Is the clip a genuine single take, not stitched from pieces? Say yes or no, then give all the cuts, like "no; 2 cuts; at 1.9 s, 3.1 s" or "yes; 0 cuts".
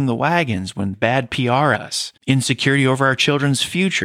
no; 3 cuts; at 0.9 s, 1.8 s, 2.2 s